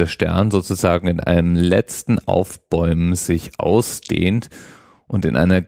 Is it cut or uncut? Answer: uncut